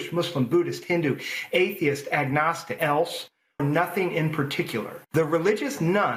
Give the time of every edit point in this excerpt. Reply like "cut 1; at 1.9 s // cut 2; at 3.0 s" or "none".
cut 1; at 2.8 s // cut 2; at 3.6 s // cut 3; at 5.1 s